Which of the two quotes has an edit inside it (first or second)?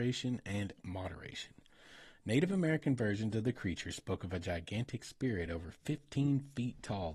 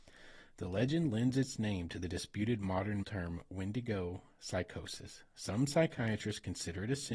second